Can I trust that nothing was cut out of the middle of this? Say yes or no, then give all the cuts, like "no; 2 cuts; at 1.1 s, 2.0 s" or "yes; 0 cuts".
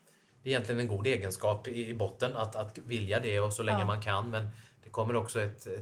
yes; 0 cuts